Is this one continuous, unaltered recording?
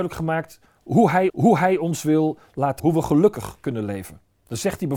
no; 2 cuts; at 1.3 s, 2.8 s

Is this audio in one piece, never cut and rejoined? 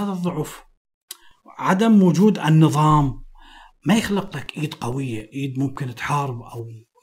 yes; 0 cuts

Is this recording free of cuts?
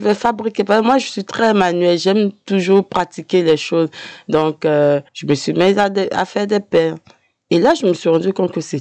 no; 1 cut; at 5.1 s

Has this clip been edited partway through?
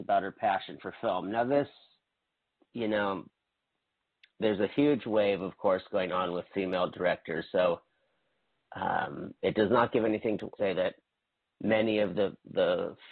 yes; 1 cut; at 10.6 s

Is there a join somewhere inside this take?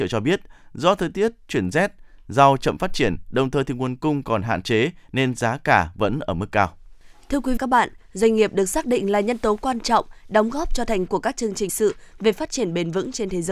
yes; 3 cuts; at 7.6 s, 11.1 s, 11.7 s

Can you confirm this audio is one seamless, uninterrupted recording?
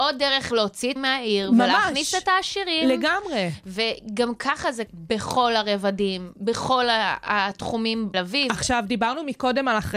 no; 3 cuts; at 1.0 s, 4.9 s, 8.1 s

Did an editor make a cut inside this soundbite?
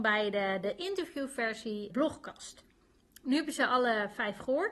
yes; 1 cut; at 1.9 s

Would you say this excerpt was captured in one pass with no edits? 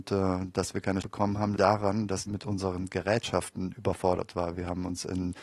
no; 3 cuts; at 1.0 s, 1.6 s, 2.3 s

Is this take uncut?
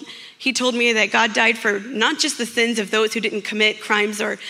yes; 0 cuts

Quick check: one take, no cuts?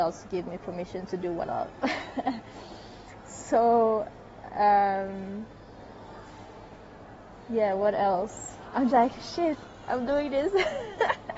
no; 2 cuts; at 1.4 s, 8.9 s

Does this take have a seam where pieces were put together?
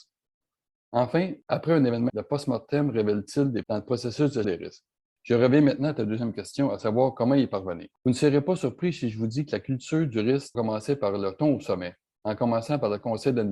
yes; 6 cuts; at 2.1 s, 3.6 s, 4.4 s, 5.0 s, 7.9 s, 10.5 s

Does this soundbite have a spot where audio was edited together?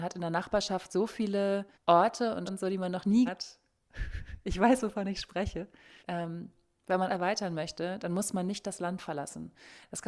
yes; 5 cuts; at 1.7 s, 2.5 s, 3.3 s, 6.0 s, 7.1 s

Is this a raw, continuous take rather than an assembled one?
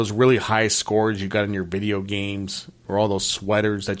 yes; 0 cuts

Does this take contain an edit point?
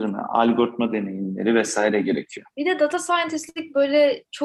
yes; 1 cut; at 2.5 s

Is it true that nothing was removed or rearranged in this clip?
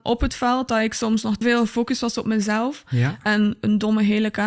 no; 1 cut; at 1.4 s

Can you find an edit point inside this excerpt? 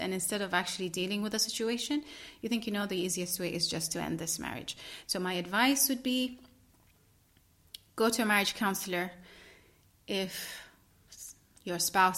no; 0 cuts

